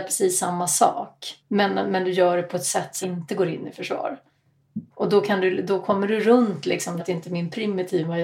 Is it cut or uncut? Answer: cut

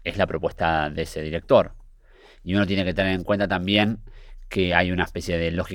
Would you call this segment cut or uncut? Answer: uncut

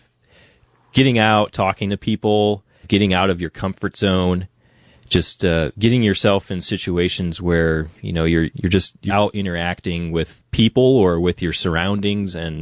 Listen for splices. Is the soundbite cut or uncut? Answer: cut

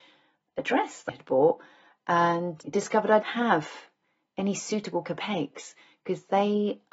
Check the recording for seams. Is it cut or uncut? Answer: cut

